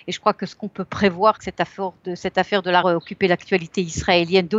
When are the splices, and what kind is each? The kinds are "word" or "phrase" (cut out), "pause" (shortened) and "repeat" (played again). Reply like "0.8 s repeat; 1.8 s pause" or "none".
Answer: 1.4 s word; 2.8 s phrase